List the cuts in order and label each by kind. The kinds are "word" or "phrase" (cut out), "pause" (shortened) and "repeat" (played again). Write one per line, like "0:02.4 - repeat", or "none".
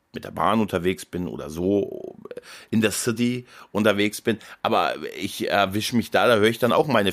none